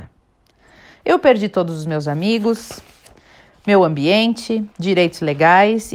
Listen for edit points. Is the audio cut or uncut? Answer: cut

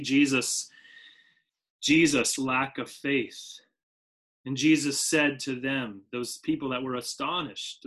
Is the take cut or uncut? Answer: cut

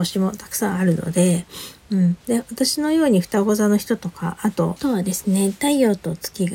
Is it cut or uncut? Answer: cut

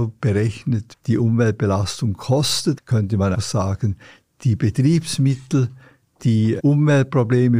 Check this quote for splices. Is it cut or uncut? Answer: cut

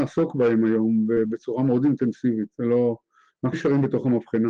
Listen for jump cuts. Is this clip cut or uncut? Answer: cut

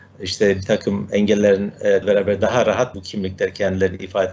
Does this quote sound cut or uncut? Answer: cut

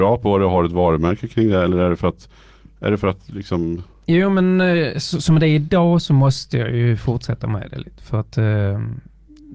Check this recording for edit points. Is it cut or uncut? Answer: uncut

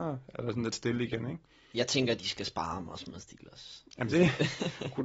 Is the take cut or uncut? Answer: uncut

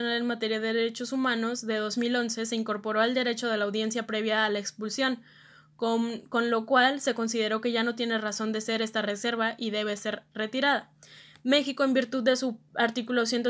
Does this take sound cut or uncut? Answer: uncut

